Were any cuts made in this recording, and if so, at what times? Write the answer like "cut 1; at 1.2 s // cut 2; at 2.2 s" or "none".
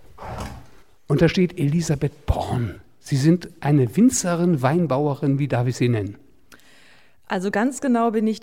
none